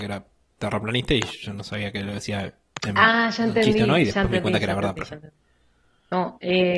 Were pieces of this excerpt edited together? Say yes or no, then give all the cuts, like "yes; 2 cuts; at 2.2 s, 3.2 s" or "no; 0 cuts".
no; 0 cuts